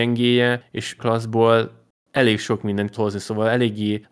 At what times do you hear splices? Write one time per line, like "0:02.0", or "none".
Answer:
0:01.0
0:02.9